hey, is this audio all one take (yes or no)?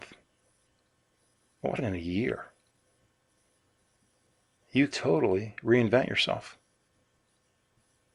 no